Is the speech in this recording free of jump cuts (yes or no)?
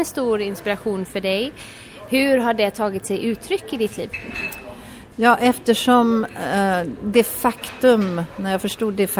yes